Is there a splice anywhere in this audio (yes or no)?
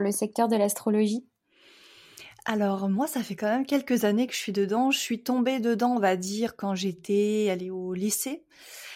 no